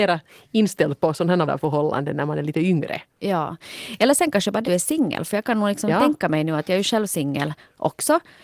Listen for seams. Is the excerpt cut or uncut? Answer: cut